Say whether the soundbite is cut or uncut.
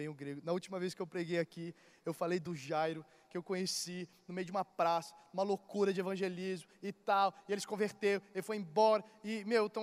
uncut